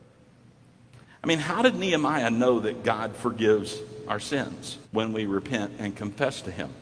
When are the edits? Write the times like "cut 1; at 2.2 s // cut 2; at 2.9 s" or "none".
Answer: cut 1; at 4.8 s